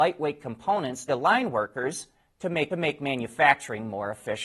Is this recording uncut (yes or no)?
no